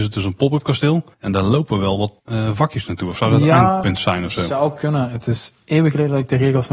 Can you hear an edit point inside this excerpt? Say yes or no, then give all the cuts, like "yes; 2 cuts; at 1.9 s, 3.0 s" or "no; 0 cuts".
yes; 2 cuts; at 1.1 s, 2.2 s